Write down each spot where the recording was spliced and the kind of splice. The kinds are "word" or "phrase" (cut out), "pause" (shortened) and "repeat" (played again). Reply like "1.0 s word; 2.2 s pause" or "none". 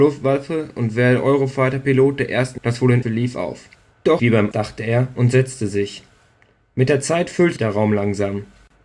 2.6 s word; 3.0 s word; 4.2 s word; 4.5 s word; 7.6 s word